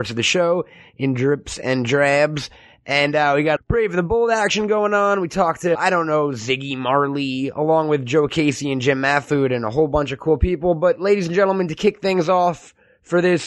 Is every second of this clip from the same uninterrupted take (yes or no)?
no